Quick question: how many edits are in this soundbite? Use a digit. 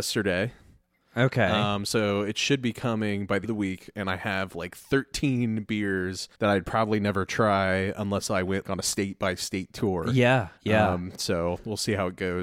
4